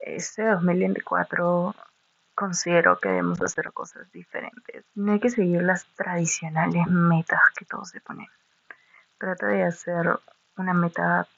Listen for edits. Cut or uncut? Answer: cut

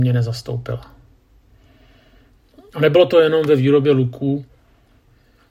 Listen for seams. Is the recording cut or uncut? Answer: uncut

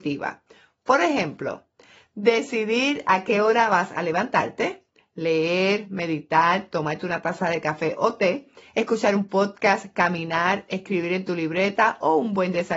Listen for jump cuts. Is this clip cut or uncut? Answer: uncut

